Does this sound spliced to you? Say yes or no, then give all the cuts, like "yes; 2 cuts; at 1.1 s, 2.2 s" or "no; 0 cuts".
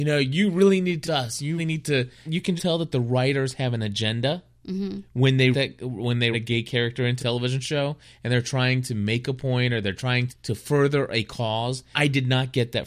yes; 9 cuts; at 1.0 s, 1.6 s, 2.2 s, 2.6 s, 5.5 s, 6.3 s, 7.2 s, 10.3 s, 11.9 s